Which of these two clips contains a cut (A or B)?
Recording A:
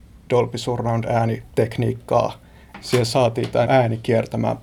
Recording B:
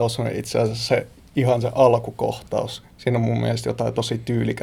A